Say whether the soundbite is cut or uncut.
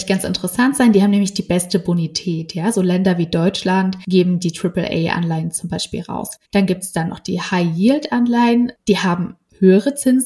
cut